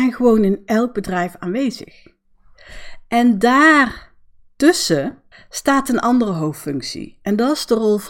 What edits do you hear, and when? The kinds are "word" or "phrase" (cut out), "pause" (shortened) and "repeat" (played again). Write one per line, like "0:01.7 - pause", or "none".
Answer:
0:05.3 - pause

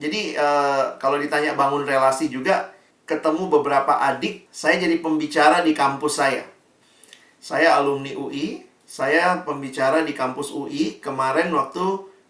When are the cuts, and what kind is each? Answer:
0:02.9 - phrase
0:04.5 - pause
0:08.8 - pause

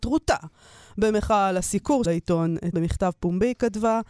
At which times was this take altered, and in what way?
0:02.0 - word
0:02.7 - word

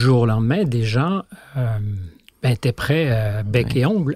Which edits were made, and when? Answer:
none

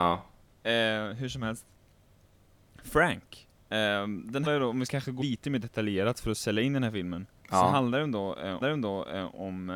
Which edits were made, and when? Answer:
0:03.5 - pause
0:04.5 - word
0:04.9 - word
0:05.2 - word
0:07.4 - pause
0:08.6 - repeat

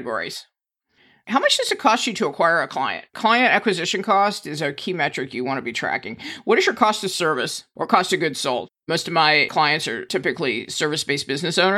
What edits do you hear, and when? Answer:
0:03.1 - pause

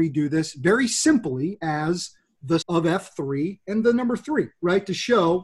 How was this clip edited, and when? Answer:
0:02.6 - word

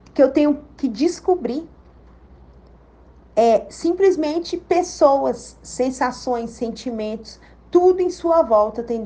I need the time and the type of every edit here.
none

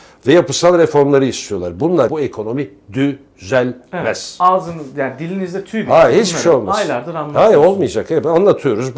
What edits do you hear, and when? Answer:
0:02.1 - word

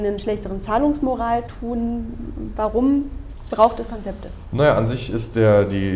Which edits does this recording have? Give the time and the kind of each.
0:01.5 - word
0:03.9 - word

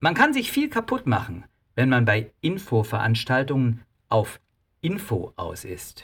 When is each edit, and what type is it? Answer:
none

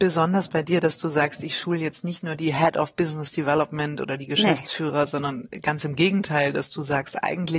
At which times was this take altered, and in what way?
none

